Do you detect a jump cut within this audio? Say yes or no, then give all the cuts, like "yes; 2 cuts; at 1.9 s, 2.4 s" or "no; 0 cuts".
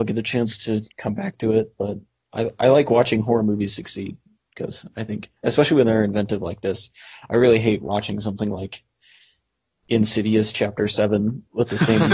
no; 0 cuts